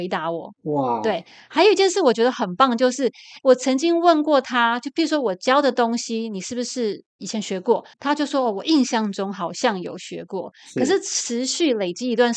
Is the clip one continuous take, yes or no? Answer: no